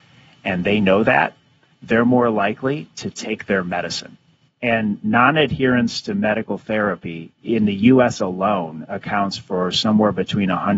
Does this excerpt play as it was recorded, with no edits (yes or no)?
yes